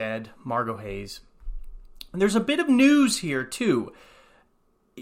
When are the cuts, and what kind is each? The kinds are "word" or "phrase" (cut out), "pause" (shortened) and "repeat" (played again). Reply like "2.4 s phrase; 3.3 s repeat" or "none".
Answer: none